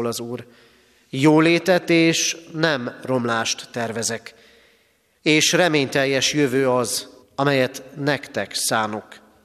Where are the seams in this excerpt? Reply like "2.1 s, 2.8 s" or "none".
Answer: 7.2 s